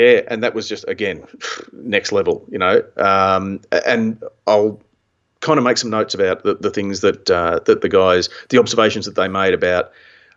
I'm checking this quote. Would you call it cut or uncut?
uncut